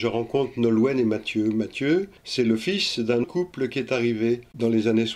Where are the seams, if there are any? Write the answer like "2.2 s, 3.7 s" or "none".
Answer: 2.2 s, 3.2 s